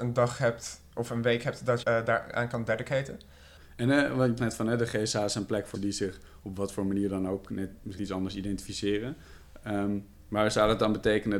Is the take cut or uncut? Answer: cut